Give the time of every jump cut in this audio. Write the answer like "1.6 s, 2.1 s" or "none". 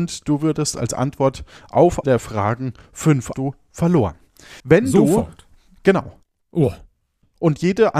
2.0 s, 3.3 s, 4.6 s